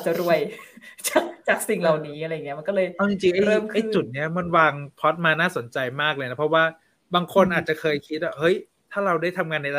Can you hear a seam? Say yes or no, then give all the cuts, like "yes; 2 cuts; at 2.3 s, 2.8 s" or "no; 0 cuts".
no; 0 cuts